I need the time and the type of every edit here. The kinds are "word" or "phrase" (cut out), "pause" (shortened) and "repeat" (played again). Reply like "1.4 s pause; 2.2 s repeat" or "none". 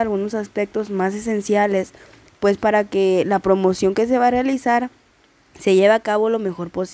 none